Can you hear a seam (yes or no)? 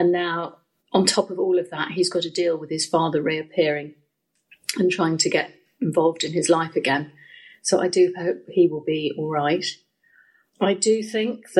no